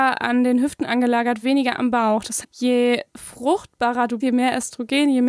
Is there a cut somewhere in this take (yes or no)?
yes